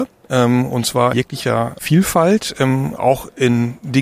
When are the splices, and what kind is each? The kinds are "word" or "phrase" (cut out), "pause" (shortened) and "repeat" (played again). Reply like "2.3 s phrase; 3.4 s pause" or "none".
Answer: 1.1 s word

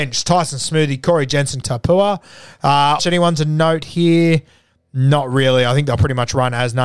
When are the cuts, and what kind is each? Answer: 1.6 s phrase; 3.0 s phrase

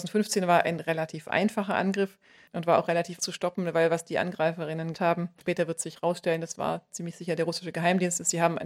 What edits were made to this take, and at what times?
2.5 s word; 3.2 s word; 4.9 s word; 5.4 s word

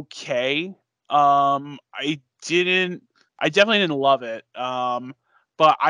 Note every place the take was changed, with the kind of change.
3.3 s pause

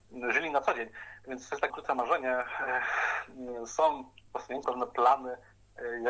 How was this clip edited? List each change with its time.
1.7 s word; 4.3 s word; 4.6 s word

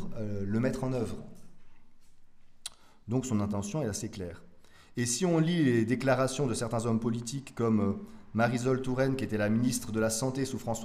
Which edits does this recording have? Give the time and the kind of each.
none

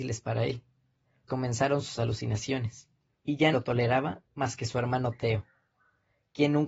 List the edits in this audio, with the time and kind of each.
1.3 s word; 3.5 s word

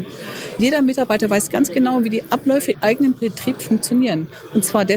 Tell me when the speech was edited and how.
2.7 s word; 3.6 s word

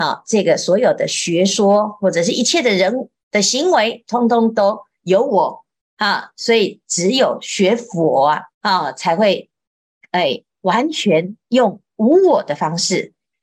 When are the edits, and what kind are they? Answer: 8.5 s pause

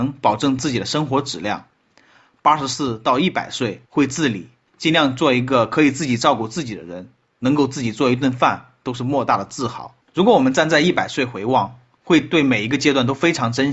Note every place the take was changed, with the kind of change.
3.8 s pause; 10.0 s pause

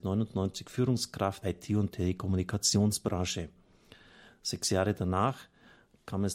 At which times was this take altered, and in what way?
1.4 s phrase

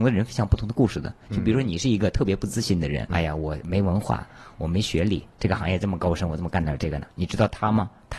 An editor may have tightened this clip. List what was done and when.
3.1 s word; 5.3 s pause

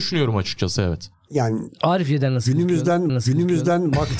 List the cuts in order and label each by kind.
3.1 s repeat

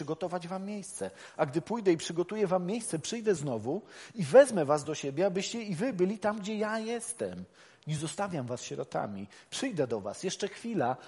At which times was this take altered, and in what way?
none

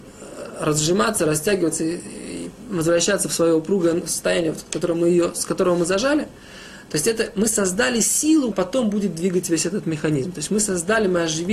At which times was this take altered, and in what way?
8.5 s word

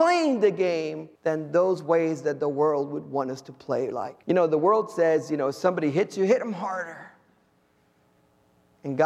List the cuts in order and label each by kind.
1.2 s pause; 4.2 s pause

